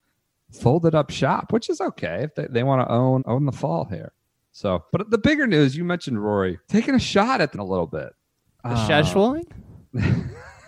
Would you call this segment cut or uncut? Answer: cut